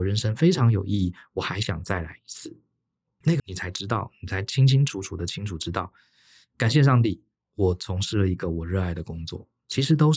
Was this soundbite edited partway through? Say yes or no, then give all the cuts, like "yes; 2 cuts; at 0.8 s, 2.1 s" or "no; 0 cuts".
yes; 1 cut; at 3.4 s